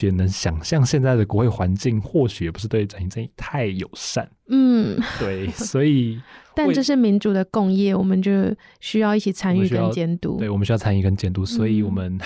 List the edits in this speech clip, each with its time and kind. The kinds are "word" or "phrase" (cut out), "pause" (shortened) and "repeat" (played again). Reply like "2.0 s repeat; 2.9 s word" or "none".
none